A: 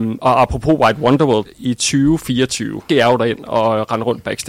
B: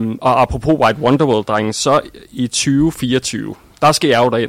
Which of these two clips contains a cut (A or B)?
A